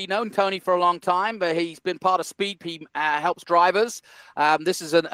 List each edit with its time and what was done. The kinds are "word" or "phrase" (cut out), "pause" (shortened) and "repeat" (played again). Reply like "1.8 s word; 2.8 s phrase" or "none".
2.6 s word; 3.4 s word